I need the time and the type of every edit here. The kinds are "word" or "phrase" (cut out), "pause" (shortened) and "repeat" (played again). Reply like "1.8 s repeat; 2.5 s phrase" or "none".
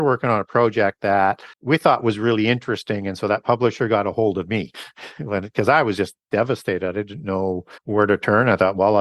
1.5 s pause; 6.2 s pause; 7.8 s pause

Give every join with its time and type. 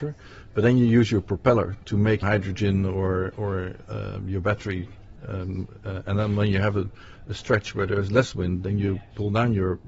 2.2 s phrase; 3.3 s word

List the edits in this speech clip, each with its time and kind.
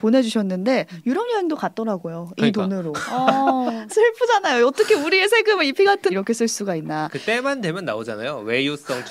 3.9 s word; 6.1 s word

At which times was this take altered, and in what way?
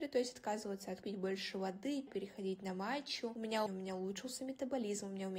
1.0 s word; 2.1 s word; 3.7 s phrase

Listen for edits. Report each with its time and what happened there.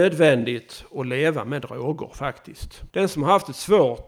2.9 s pause

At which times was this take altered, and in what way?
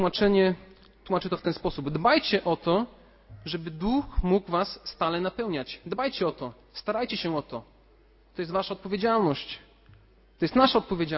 none

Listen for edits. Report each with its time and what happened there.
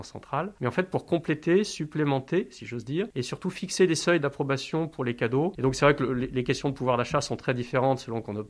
none

